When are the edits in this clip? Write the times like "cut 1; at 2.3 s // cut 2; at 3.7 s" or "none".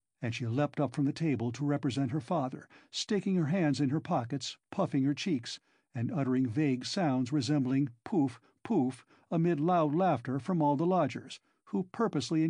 none